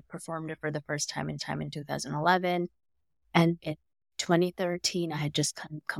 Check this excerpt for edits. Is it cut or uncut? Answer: cut